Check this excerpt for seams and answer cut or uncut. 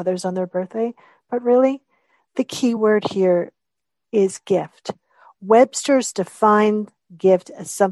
uncut